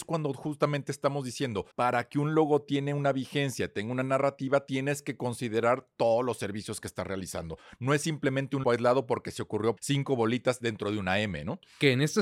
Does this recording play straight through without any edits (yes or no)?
no